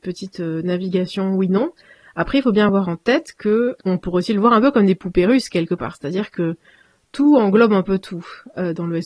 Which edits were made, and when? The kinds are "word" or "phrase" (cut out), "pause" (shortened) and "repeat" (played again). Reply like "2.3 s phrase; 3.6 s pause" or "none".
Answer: none